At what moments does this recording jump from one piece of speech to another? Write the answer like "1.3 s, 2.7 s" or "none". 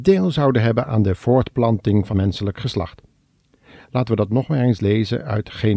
2.1 s